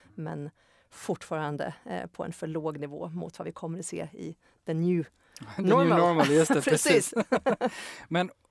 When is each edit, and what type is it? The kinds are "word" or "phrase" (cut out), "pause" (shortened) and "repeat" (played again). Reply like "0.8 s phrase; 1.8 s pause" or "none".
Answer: none